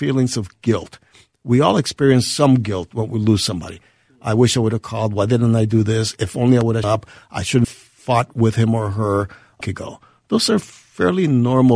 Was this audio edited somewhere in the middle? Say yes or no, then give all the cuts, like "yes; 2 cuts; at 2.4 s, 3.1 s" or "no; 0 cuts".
yes; 3 cuts; at 6.8 s, 7.6 s, 9.6 s